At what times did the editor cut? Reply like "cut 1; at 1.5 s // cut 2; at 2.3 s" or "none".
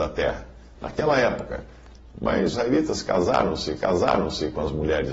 cut 1; at 2.5 s // cut 2; at 3.8 s